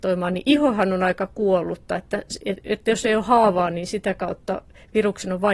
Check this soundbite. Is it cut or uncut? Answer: uncut